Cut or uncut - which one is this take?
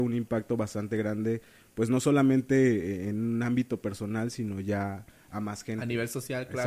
uncut